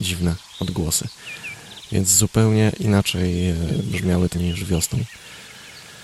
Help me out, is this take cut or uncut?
cut